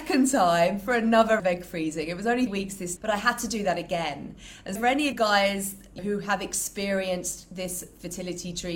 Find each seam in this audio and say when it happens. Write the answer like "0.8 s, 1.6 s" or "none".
1.4 s, 2.5 s, 3.0 s, 4.8 s, 5.1 s, 6.0 s